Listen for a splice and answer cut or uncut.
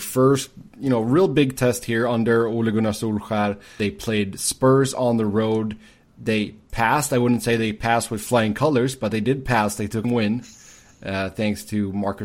cut